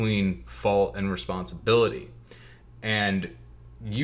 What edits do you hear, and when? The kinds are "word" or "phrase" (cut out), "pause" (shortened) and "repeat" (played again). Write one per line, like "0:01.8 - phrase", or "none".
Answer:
none